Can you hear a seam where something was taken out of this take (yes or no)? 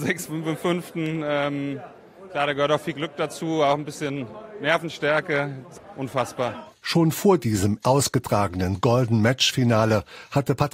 yes